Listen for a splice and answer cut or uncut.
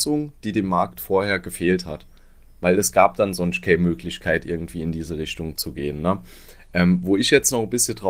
uncut